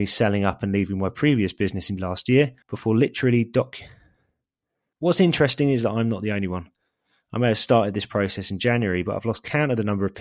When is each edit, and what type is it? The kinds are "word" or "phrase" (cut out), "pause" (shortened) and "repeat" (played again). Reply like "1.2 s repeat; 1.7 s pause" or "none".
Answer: 2.0 s word; 2.6 s pause

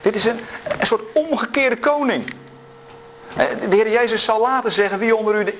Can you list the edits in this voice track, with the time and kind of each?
none

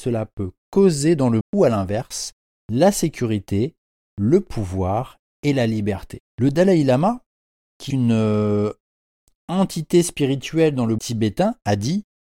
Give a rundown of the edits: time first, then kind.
1.4 s word; 7.9 s word; 11.0 s word

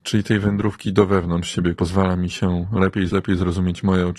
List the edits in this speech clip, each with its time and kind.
1.7 s word; 3.1 s word

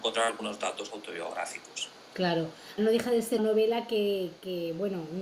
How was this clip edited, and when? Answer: 2.8 s phrase; 3.4 s word

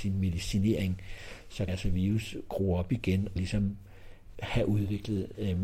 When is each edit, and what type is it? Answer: 1.7 s word; 3.4 s word; 4.3 s word

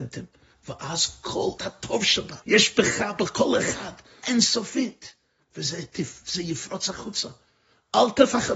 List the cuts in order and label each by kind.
1.6 s word; 2.4 s pause; 4.2 s word

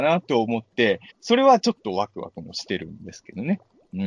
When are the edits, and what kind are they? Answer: 1.1 s pause

